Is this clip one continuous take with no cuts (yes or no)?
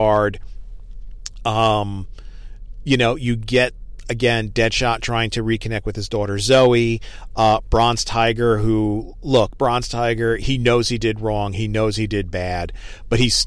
yes